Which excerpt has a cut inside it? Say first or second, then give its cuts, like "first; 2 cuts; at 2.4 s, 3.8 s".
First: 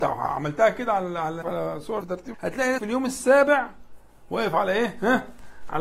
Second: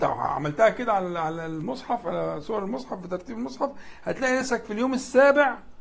first; 4 cuts; at 1.4 s, 2.0 s, 2.3 s, 2.8 s